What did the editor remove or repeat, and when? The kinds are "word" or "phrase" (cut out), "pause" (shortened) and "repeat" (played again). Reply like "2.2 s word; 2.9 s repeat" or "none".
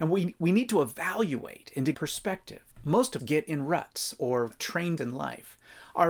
1.9 s word; 2.7 s pause; 3.2 s word; 4.5 s word; 5.0 s word